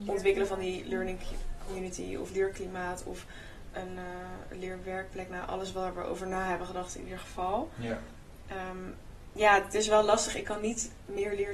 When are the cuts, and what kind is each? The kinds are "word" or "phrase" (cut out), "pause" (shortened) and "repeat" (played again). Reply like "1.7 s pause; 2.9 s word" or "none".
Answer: 2.3 s phrase; 3.7 s word